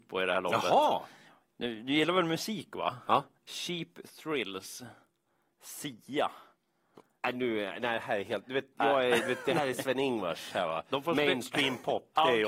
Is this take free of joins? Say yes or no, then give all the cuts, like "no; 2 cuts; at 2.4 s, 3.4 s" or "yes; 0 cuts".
yes; 0 cuts